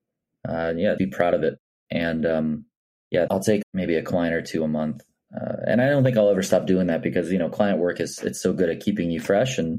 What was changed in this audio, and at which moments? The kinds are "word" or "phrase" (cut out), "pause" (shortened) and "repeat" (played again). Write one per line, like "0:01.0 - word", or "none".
0:01.0 - word
0:03.3 - word
0:03.6 - word